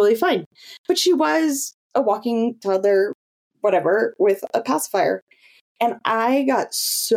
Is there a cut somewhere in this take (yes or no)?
no